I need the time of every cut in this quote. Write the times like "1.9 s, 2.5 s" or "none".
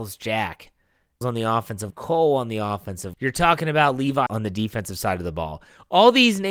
1.2 s, 1.9 s, 3.1 s, 4.3 s